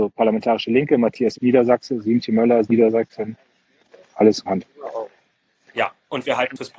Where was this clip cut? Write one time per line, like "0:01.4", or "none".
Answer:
0:01.3
0:02.6
0:04.5